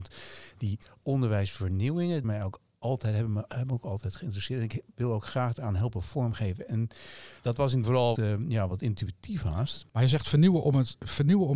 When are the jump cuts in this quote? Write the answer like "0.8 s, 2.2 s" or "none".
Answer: 2.2 s, 7.4 s, 7.8 s, 8.2 s, 9.9 s